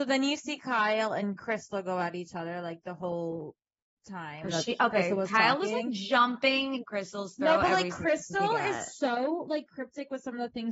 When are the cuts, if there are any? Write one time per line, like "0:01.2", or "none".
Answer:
0:06.8